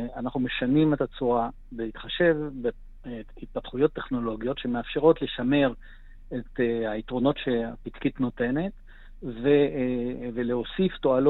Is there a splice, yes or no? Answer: no